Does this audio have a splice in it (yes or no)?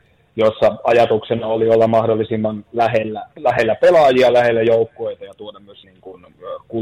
yes